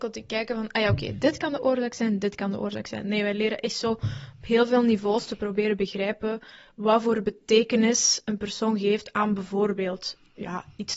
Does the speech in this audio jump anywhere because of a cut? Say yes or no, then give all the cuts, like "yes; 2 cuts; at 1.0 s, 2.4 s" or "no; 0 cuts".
no; 0 cuts